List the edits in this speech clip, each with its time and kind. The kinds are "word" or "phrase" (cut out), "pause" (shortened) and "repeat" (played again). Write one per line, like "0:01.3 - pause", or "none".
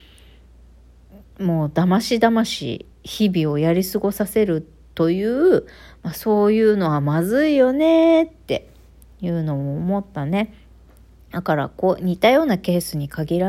0:02.9 - pause